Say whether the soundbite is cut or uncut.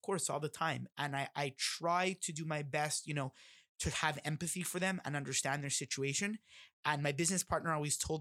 uncut